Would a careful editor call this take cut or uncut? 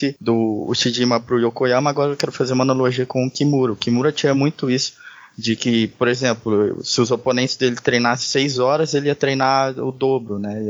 uncut